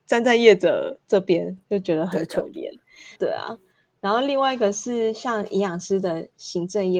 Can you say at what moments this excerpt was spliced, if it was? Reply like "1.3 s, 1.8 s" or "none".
3.2 s